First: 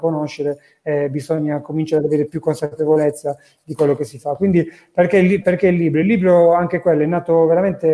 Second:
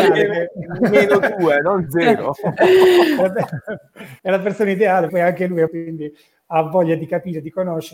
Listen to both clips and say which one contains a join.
second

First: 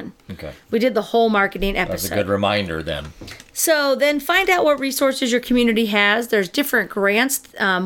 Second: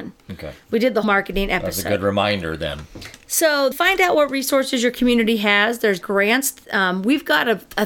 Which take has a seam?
second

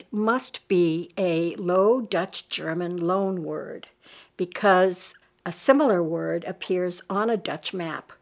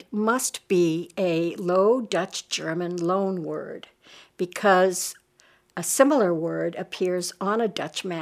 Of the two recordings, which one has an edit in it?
first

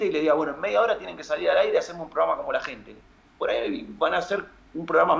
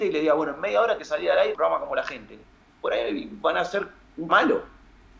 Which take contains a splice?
second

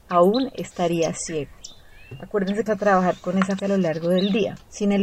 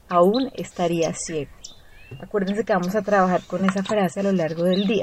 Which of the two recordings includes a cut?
first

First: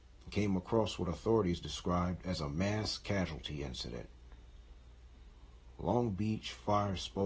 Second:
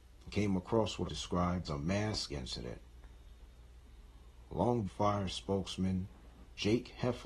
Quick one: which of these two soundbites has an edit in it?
second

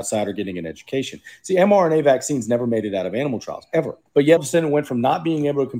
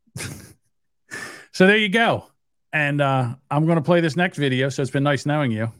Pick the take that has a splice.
first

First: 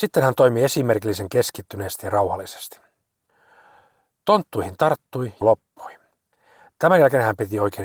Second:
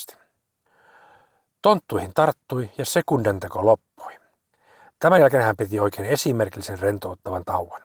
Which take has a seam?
first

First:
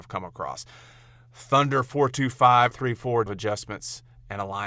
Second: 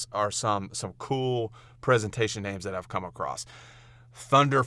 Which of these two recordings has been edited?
first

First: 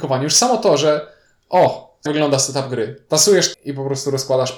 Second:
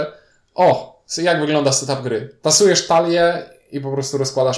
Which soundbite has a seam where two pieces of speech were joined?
first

